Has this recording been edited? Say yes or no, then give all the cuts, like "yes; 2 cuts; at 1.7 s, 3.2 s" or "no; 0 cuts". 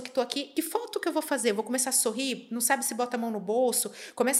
no; 0 cuts